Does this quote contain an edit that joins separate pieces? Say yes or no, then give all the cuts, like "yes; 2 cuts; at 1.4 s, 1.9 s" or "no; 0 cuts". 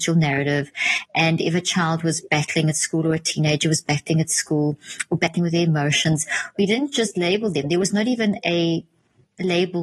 no; 0 cuts